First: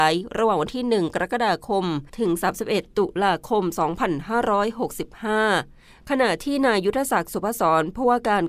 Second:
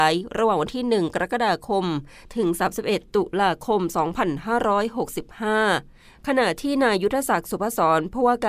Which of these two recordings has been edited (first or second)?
first